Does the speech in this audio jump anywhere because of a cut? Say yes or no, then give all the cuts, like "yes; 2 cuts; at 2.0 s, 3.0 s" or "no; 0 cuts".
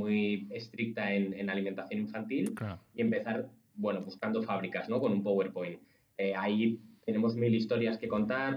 no; 0 cuts